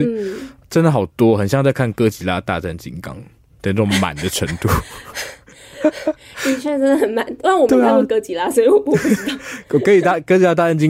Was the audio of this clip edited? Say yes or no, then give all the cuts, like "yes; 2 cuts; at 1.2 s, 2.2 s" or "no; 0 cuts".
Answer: no; 0 cuts